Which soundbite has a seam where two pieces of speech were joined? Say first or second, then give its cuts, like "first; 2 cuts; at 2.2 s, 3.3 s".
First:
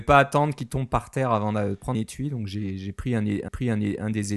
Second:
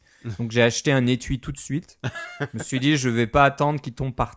first; 2 cuts; at 1.9 s, 3.5 s